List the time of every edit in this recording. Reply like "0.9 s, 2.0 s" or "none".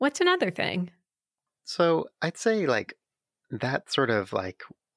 none